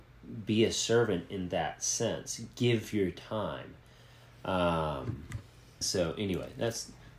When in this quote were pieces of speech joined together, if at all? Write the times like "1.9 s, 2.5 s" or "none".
5.8 s